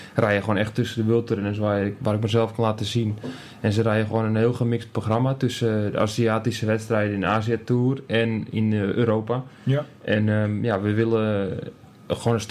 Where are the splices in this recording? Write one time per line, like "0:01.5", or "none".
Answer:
none